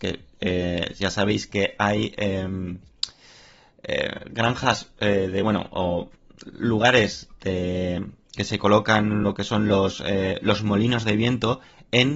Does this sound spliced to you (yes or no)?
no